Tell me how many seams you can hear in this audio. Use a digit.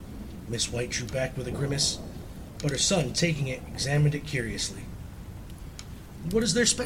0